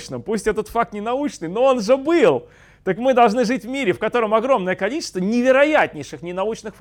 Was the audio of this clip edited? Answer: no; 0 cuts

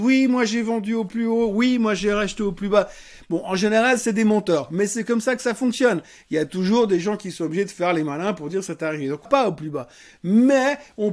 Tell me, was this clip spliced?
yes; 1 cut; at 9.3 s

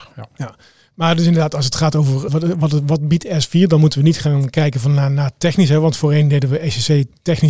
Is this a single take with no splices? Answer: no; 1 cut; at 2.3 s

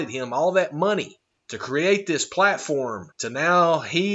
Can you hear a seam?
yes; 2 cuts; at 1.4 s, 3.1 s

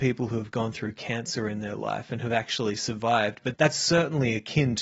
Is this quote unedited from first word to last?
no; 1 cut; at 3.5 s

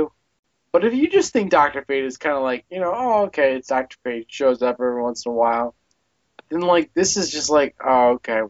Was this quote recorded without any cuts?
yes; 0 cuts

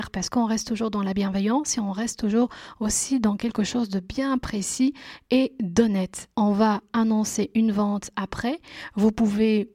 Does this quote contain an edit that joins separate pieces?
yes; 1 cut; at 6.3 s

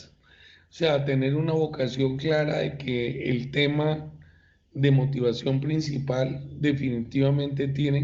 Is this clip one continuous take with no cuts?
yes; 0 cuts

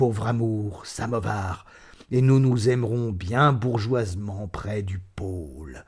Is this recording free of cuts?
yes; 0 cuts

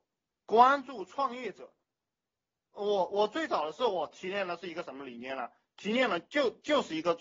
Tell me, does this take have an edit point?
no; 0 cuts

